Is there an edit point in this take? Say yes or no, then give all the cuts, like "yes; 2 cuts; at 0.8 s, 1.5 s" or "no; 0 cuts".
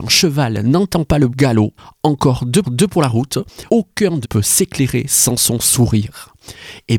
yes; 5 cuts; at 1.3 s, 1.8 s, 2.6 s, 3.7 s, 4.2 s